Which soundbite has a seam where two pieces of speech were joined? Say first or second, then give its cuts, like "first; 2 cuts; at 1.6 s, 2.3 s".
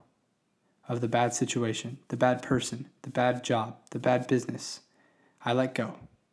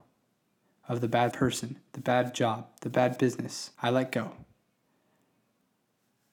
second; 2 cuts; at 1.3 s, 3.7 s